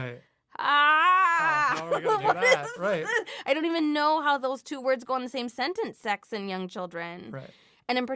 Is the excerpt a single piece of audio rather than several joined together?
yes; 0 cuts

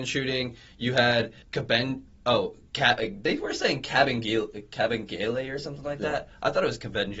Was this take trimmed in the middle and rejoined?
yes; 1 cut; at 1.4 s

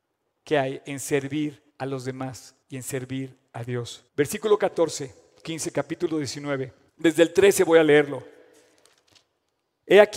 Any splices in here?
yes; 5 cuts; at 1.7 s, 2.6 s, 4.1 s, 5.4 s, 6.9 s

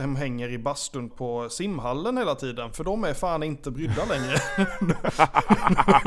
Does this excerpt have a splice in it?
yes; 1 cut; at 1.1 s

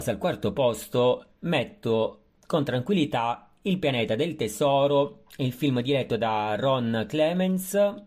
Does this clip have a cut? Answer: no; 0 cuts

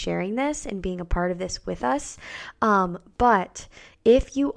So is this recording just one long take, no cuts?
yes; 0 cuts

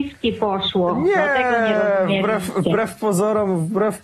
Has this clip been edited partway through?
no; 0 cuts

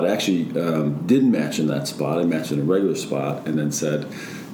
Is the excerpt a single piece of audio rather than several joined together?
yes; 0 cuts

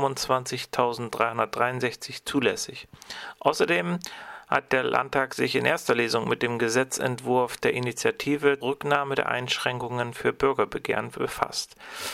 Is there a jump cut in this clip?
yes; 1 cut; at 8.6 s

